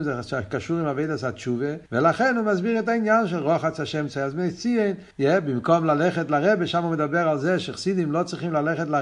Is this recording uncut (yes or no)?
no